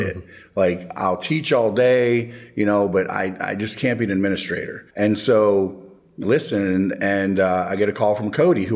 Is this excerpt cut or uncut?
cut